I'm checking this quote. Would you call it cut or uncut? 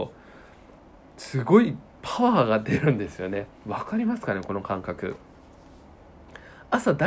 cut